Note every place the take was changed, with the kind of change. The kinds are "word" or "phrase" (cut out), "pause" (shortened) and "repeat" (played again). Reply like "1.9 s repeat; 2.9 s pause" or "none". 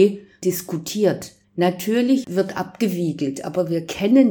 1.4 s pause